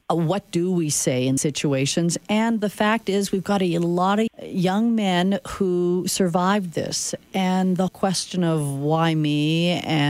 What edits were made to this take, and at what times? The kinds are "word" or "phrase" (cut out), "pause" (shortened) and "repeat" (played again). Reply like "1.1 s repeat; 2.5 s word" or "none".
1.4 s word; 4.3 s word; 7.9 s word